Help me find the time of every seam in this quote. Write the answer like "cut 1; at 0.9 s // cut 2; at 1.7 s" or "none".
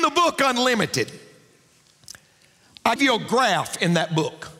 cut 1; at 3.0 s